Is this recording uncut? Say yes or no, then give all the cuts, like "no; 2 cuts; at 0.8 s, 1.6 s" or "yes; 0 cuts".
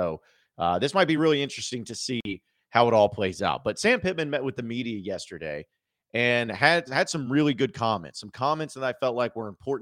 yes; 0 cuts